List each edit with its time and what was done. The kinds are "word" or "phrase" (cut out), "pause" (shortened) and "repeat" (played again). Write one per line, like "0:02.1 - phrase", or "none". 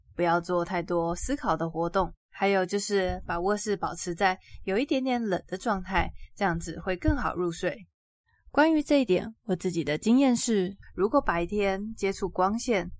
0:02.2 - pause
0:08.1 - pause